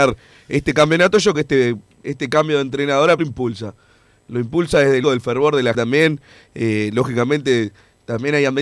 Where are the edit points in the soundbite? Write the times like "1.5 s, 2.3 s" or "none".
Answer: 1.3 s, 3.2 s, 5.0 s, 5.7 s